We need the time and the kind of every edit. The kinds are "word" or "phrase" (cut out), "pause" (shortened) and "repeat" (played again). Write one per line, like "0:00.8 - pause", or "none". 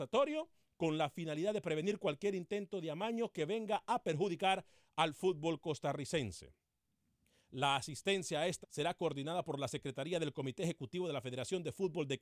0:08.6 - word